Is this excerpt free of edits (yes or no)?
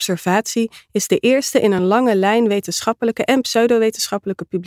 yes